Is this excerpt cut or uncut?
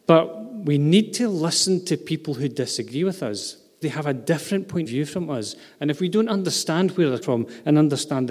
cut